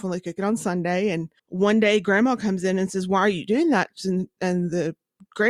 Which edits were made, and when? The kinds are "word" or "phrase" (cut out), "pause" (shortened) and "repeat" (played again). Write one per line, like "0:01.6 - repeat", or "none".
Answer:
0:01.4 - pause